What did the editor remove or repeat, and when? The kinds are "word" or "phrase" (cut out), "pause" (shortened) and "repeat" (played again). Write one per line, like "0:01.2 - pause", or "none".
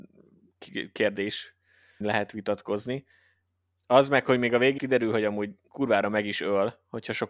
0:02.0 - word
0:04.8 - word
0:05.7 - word